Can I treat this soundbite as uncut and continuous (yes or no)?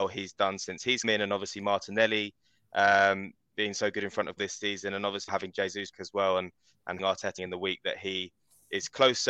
no